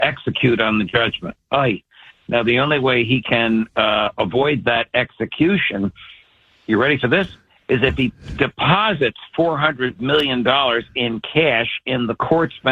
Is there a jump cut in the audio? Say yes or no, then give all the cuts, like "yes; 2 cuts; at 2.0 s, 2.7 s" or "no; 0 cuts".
no; 0 cuts